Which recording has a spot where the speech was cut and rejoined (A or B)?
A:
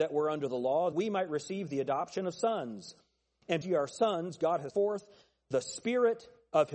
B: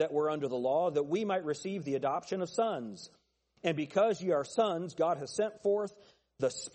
A